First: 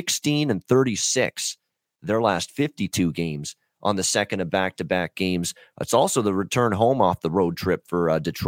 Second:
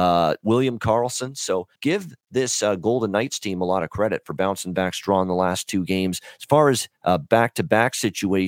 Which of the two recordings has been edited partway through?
second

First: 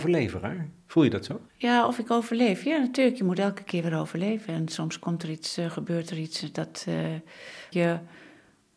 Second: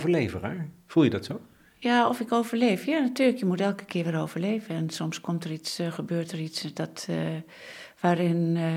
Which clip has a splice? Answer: first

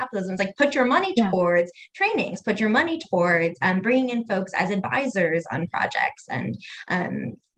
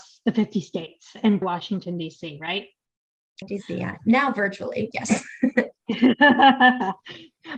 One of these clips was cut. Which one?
second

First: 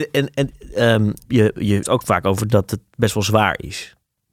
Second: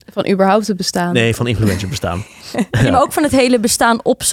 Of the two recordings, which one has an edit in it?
first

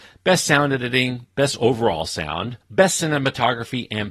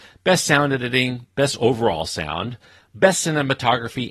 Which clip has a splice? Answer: first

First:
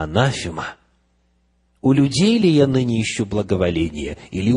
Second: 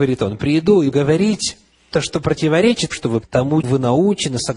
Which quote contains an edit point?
second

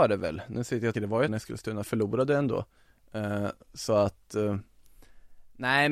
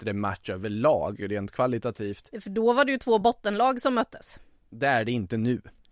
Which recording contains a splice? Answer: first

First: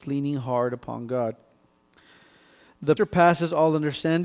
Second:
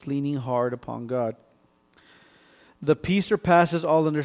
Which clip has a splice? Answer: first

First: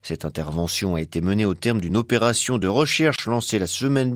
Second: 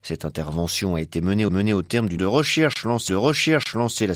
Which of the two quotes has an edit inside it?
second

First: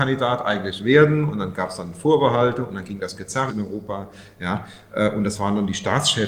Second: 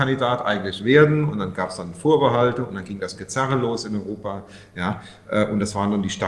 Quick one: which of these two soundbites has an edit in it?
first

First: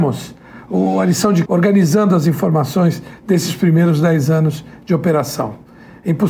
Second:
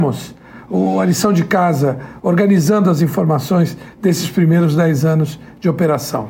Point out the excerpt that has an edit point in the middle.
first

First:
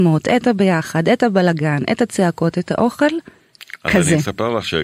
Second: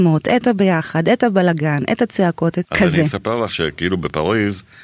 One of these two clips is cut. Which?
second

